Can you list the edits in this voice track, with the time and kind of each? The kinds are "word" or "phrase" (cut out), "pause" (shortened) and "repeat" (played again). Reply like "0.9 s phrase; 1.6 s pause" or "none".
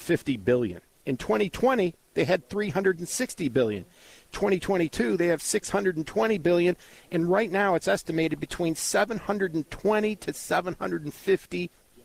none